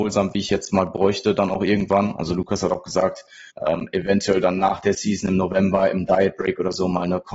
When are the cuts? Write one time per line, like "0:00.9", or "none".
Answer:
0:03.5